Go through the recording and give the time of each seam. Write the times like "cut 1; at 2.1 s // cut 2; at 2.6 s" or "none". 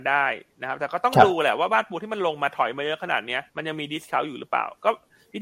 cut 1; at 3.5 s